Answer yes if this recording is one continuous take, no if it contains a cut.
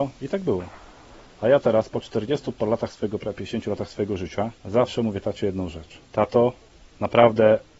no